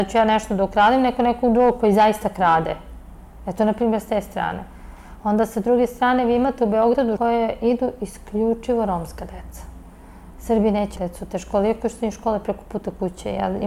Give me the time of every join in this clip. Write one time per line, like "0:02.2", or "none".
0:07.2
0:11.0

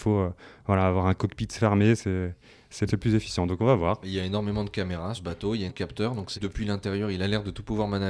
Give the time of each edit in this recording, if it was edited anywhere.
0:02.9
0:05.2
0:05.7
0:06.3

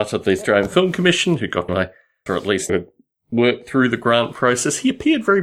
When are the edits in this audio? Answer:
0:01.7
0:02.3
0:02.7

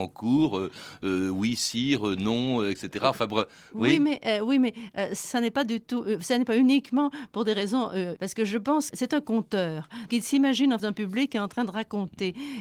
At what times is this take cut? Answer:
0:05.2
0:08.2
0:08.9
0:10.1
0:10.8

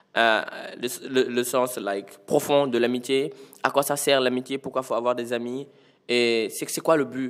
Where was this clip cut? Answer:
none

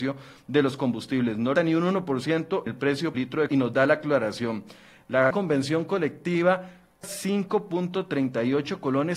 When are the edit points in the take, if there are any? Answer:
0:01.6
0:02.7
0:03.1
0:03.5
0:05.3
0:07.0

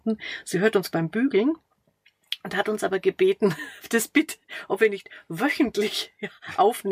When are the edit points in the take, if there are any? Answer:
none

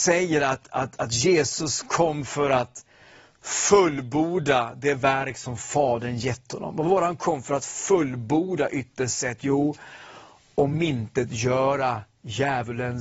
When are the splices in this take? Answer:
none

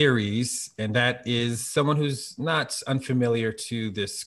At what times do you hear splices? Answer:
none

